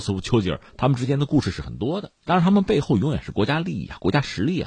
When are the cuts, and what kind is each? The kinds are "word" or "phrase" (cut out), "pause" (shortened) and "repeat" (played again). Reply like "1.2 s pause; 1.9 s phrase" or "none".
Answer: 2.2 s pause